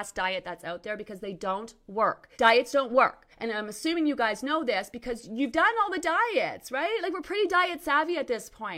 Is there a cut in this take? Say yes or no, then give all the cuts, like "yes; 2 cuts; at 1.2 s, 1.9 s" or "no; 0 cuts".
yes; 2 cuts; at 2.3 s, 3.3 s